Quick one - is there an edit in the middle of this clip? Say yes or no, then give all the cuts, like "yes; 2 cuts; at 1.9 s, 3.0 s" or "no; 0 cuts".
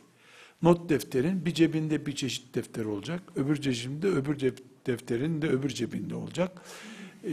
no; 0 cuts